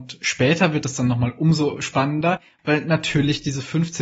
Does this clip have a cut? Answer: no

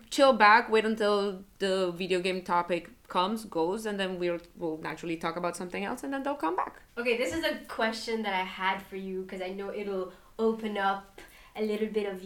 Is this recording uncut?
no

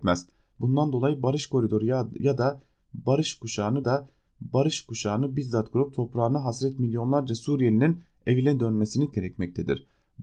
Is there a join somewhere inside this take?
yes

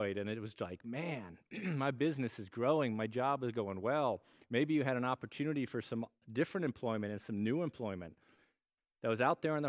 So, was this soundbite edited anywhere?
no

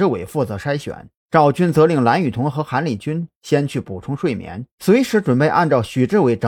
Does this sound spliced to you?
yes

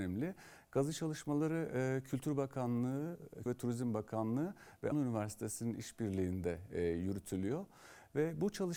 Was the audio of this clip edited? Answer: yes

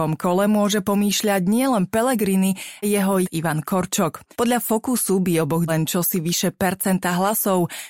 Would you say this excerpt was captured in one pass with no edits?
no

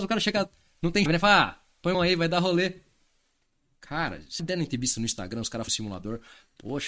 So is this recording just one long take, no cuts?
no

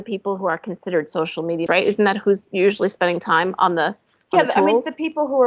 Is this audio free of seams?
no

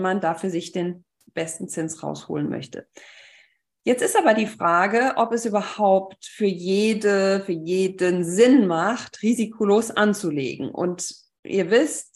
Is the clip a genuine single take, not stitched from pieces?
yes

